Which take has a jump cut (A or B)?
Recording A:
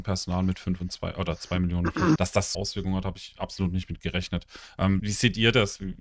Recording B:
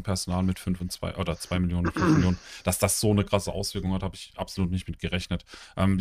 A